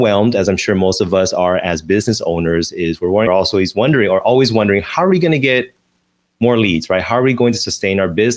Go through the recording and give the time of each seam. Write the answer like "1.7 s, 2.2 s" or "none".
3.3 s